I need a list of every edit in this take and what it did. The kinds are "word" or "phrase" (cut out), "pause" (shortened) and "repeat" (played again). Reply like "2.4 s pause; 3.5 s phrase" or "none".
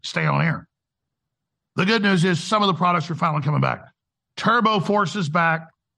none

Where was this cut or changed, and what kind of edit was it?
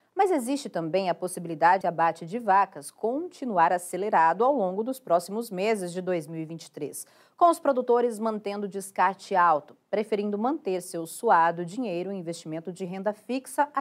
1.8 s word

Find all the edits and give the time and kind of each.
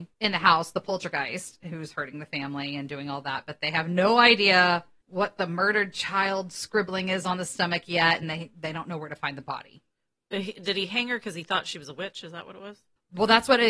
none

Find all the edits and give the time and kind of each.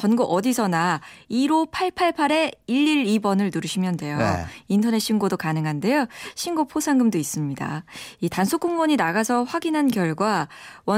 none

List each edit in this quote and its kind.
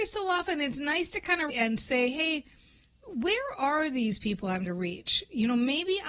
1.5 s word; 4.7 s word

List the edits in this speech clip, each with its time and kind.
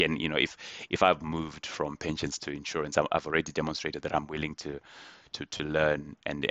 none

